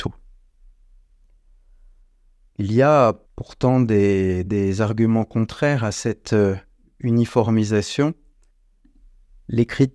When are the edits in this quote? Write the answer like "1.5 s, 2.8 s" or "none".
3.2 s, 4.5 s